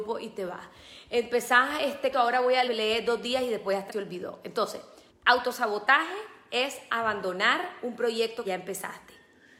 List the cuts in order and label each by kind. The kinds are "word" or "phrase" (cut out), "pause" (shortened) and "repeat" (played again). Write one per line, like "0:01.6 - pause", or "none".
0:02.1 - phrase
0:02.7 - word
0:03.9 - word
0:05.1 - pause
0:08.4 - word